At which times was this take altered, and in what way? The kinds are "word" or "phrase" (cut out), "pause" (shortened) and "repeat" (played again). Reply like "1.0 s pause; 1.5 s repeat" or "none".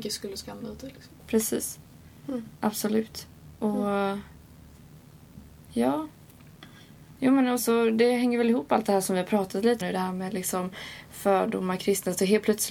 1.2 s word; 7.6 s word; 9.8 s word; 11.8 s word